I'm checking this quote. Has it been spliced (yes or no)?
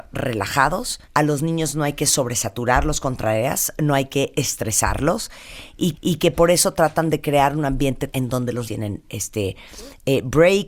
yes